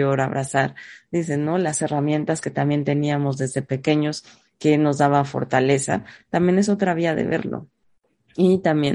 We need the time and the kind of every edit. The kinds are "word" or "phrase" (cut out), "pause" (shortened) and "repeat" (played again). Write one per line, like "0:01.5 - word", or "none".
none